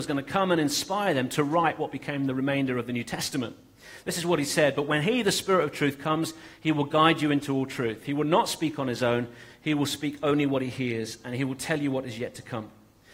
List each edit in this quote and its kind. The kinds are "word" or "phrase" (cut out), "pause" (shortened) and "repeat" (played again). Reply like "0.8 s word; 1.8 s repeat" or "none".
none